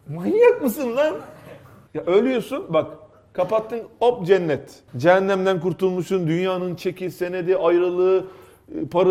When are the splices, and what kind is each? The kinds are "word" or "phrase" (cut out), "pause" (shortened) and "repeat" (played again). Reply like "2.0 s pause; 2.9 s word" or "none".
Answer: 4.9 s pause